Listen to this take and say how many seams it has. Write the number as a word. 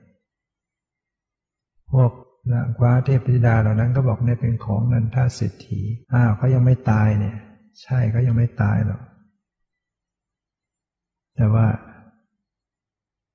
two